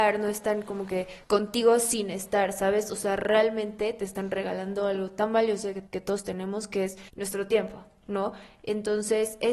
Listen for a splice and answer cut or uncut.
cut